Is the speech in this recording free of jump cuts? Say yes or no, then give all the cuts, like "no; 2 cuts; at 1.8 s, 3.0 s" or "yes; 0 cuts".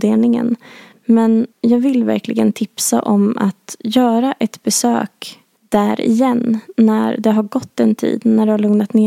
no; 2 cuts; at 1.5 s, 5.6 s